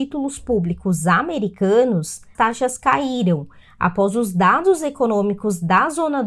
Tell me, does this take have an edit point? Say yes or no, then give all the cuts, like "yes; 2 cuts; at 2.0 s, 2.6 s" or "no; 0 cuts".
yes; 1 cut; at 2.3 s